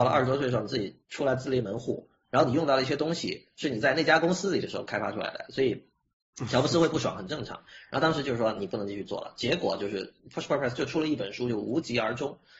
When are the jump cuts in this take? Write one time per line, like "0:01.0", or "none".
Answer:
0:01.0